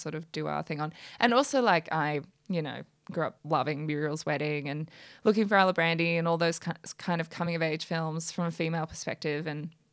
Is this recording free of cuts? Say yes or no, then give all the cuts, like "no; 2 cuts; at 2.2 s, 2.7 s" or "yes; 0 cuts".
yes; 0 cuts